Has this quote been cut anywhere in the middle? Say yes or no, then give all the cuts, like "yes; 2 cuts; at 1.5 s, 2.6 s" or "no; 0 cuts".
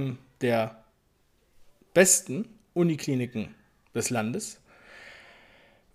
no; 0 cuts